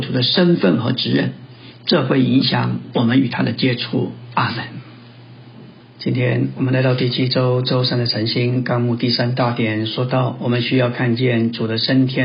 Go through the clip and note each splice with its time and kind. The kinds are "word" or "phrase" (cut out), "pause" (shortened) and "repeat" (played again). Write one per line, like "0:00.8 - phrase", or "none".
0:05.8 - pause